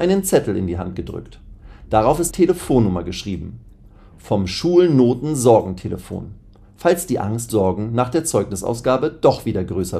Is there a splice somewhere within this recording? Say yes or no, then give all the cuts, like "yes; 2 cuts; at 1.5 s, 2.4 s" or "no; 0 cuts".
yes; 2 cuts; at 2.3 s, 7.5 s